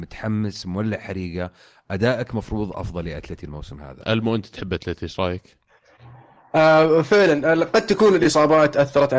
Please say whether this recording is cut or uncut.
uncut